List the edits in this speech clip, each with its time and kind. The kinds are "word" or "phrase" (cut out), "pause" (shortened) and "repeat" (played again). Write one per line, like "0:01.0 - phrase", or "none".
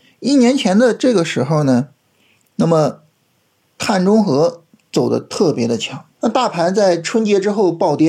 0:06.1 - pause